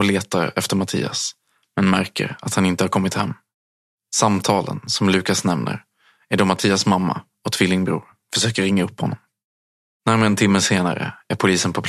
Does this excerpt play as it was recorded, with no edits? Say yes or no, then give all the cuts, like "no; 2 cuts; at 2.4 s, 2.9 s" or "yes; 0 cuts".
yes; 0 cuts